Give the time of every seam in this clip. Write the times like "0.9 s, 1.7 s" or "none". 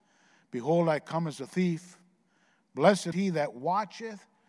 3.1 s